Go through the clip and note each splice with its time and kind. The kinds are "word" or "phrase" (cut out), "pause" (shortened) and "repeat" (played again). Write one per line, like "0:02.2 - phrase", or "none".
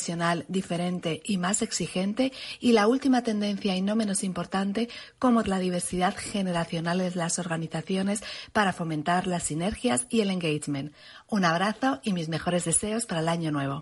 0:05.4 - word